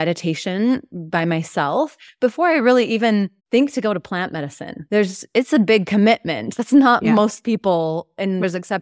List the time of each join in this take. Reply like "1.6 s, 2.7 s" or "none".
3.4 s